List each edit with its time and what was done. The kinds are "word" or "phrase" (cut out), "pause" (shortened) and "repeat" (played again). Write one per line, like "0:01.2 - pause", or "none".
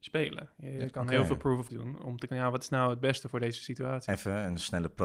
0:01.7 - word
0:02.3 - word